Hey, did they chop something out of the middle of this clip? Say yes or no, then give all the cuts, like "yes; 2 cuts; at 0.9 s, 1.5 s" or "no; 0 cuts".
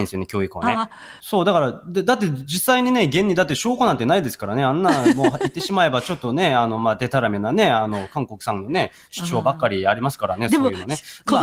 no; 0 cuts